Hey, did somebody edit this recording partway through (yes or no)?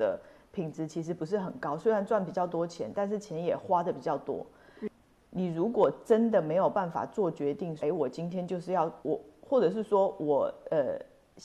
yes